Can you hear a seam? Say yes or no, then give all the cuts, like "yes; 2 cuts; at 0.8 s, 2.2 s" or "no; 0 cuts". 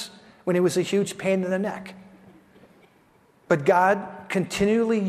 no; 0 cuts